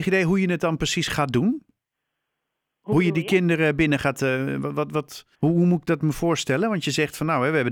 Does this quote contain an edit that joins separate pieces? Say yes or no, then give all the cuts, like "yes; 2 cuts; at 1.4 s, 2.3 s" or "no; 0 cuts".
yes; 1 cut; at 5.3 s